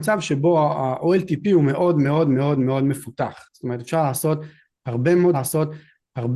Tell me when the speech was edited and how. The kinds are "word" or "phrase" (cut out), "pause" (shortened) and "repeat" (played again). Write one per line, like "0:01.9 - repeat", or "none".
0:05.3 - repeat

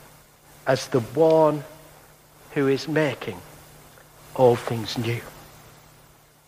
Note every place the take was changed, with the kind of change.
none

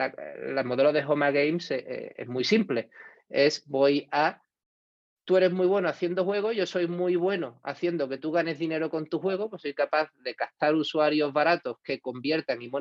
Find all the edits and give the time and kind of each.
none

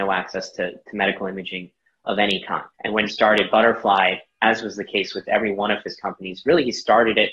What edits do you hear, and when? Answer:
0:02.7 - pause
0:03.1 - word

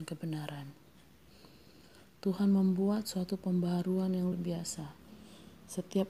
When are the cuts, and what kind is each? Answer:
0:04.3 - word

